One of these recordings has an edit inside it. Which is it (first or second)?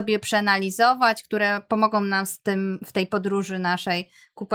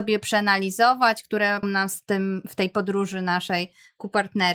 second